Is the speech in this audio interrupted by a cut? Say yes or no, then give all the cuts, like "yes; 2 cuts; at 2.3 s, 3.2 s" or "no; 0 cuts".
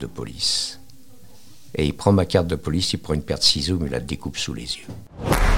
no; 0 cuts